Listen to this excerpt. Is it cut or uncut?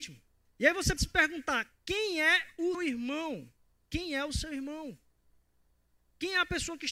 cut